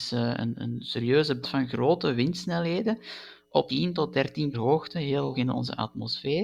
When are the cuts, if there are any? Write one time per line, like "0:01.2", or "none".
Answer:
0:01.4
0:03.7
0:04.5
0:05.3